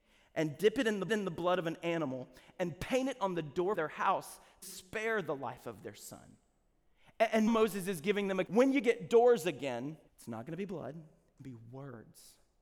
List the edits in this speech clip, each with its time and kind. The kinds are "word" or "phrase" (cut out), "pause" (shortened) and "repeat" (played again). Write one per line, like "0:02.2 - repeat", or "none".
0:01.1 - repeat
0:03.7 - phrase
0:04.6 - word
0:07.5 - word
0:08.5 - word
0:10.1 - pause
0:11.4 - phrase